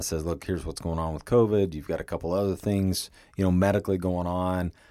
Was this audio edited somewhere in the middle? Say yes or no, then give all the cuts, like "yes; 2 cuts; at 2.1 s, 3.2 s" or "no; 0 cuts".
no; 0 cuts